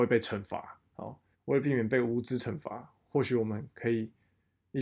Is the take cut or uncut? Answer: cut